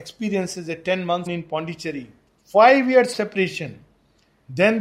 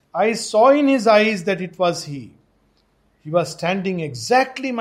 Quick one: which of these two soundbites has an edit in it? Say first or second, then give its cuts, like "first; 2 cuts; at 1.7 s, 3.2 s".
first; 3 cuts; at 1.3 s, 2.3 s, 3.1 s